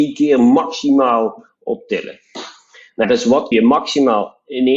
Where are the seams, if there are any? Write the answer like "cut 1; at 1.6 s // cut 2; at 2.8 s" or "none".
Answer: cut 1; at 3.0 s // cut 2; at 3.5 s

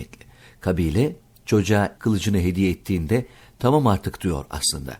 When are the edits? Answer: cut 1; at 2.0 s

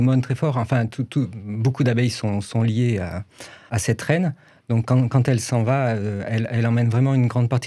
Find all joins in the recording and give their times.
cut 1; at 3.7 s

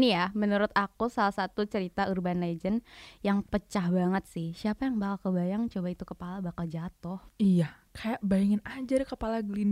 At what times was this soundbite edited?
cut 1; at 7.3 s

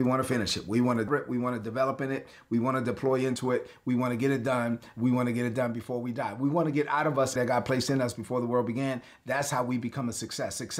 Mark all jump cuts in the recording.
cut 1; at 1.1 s // cut 2; at 7.4 s

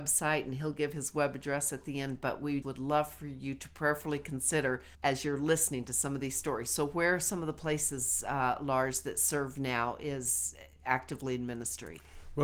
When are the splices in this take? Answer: cut 1; at 2.6 s // cut 2; at 4.9 s

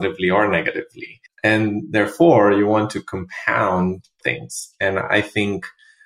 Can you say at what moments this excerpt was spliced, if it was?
cut 1; at 1.3 s // cut 2; at 4.2 s

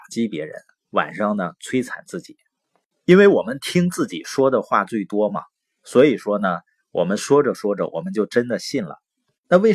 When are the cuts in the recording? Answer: none

